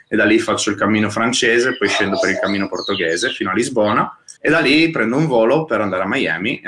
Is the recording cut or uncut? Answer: cut